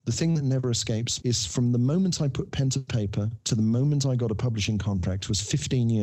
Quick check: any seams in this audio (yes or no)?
yes